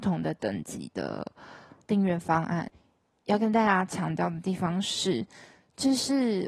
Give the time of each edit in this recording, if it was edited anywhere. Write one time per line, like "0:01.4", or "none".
none